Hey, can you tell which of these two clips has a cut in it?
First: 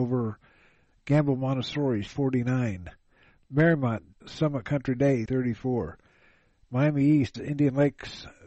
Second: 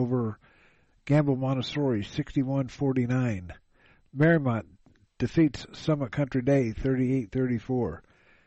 first; 4 cuts; at 2.1 s, 4.2 s, 5.3 s, 7.3 s

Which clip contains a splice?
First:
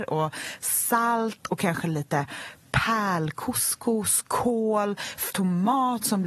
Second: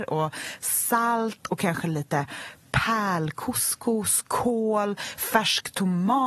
first; 1 cut; at 5.3 s

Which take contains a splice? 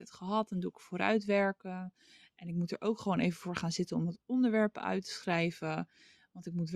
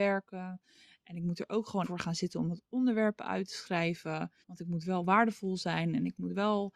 second; 2 cuts; at 1.8 s, 4.4 s

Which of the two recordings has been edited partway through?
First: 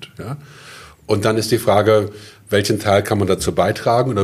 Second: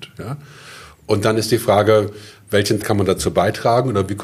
second; 1 cut; at 2.8 s

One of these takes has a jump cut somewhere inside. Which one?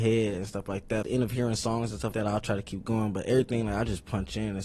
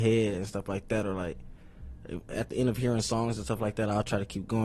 first; 2 cuts; at 1.0 s, 2.1 s

